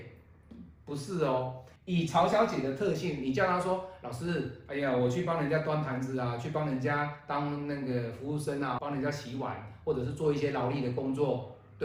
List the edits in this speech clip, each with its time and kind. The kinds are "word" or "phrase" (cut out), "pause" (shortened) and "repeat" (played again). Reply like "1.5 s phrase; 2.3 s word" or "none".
1.8 s pause; 8.8 s word